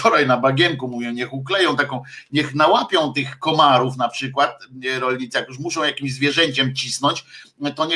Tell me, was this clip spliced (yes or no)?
no